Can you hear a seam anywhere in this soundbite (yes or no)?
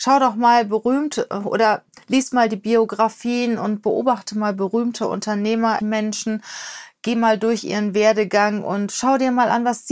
yes